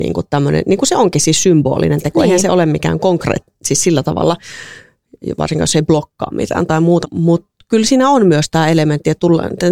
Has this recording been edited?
yes; 1 cut; at 7.0 s

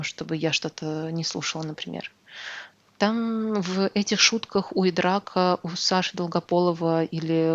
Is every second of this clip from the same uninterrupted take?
yes; 0 cuts

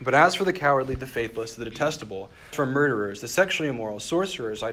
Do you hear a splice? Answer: yes; 1 cut; at 2.5 s

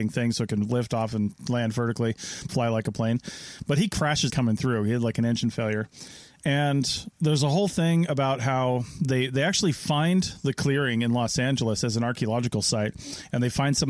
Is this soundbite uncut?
no; 3 cuts; at 2.5 s, 4.3 s, 7.1 s

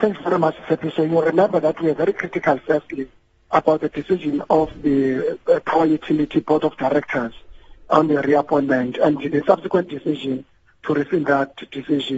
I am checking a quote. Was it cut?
no; 0 cuts

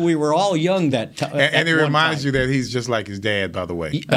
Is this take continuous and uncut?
yes; 0 cuts

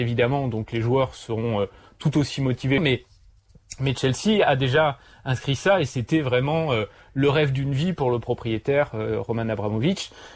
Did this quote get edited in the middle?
no; 0 cuts

